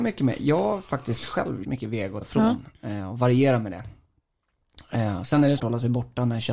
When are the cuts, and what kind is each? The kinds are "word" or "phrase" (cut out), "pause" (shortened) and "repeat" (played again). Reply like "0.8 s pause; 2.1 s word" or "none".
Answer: 1.6 s word; 2.2 s word; 5.6 s word